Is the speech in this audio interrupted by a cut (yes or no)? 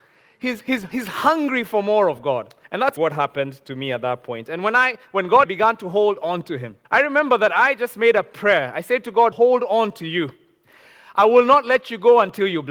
yes